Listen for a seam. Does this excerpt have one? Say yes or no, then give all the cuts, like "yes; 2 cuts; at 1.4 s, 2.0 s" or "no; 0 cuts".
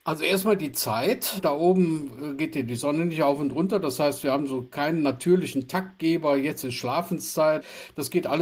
no; 0 cuts